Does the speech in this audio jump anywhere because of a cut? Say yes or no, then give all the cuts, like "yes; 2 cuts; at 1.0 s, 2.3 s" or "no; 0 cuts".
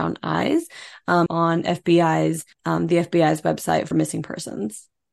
yes; 3 cuts; at 1.3 s, 2.5 s, 3.9 s